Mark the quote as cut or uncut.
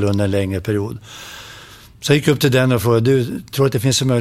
uncut